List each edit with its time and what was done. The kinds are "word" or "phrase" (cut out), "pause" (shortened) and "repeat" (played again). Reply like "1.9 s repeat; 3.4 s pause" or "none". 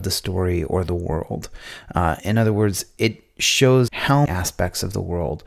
2.2 s word; 3.9 s word; 4.3 s word